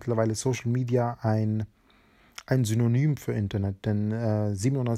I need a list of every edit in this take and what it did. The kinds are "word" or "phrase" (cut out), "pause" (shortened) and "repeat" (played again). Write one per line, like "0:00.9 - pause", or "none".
none

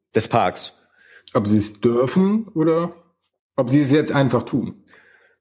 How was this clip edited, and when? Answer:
none

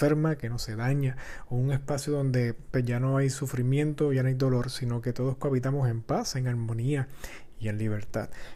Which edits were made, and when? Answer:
none

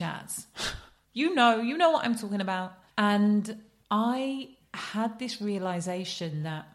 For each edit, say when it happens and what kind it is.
none

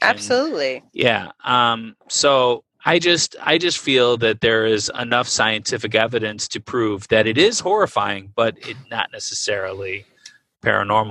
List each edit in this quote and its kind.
0:02.7 - pause

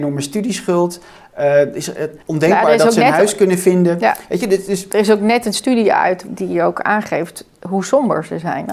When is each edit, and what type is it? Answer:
0:02.2 - pause
0:06.3 - word

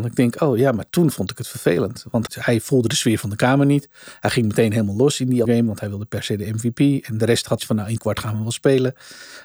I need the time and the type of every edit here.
0:02.3 - word
0:05.4 - word
0:07.6 - word
0:08.0 - word

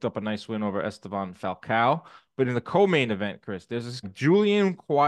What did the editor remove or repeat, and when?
0:04.0 - word

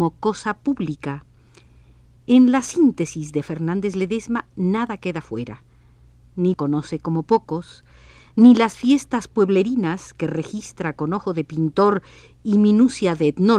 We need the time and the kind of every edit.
0:06.5 - phrase

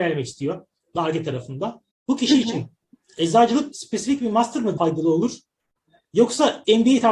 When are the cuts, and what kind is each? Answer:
0:00.9 - phrase
0:01.9 - pause
0:03.7 - word
0:04.8 - word

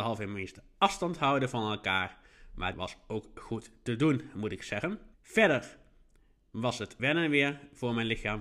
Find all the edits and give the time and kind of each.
0:02.7 - phrase
0:05.1 - pause
0:07.0 - word

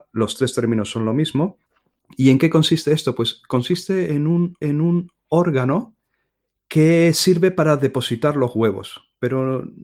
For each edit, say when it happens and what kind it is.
0:04.6 - repeat

